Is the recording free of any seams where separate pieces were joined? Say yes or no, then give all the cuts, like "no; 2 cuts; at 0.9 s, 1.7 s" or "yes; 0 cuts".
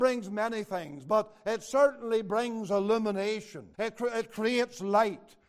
no; 1 cut; at 3.7 s